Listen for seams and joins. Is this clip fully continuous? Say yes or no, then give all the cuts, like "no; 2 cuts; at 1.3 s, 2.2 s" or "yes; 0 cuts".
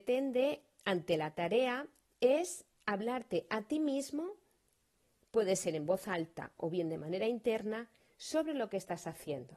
yes; 0 cuts